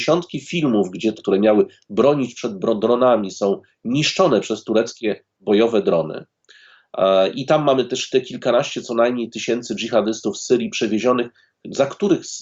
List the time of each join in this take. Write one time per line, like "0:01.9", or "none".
0:01.2